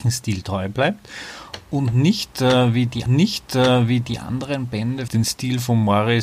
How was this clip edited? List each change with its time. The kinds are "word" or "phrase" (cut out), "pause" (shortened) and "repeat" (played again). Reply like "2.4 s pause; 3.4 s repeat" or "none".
3.1 s repeat; 5.1 s word